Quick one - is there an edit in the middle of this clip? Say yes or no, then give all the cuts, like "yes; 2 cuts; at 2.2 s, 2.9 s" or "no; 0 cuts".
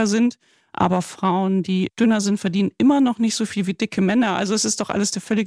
no; 0 cuts